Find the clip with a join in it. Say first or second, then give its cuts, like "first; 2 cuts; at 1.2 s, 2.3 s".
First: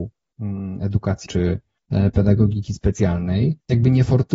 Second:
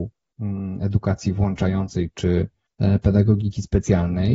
first; 1 cut; at 1.2 s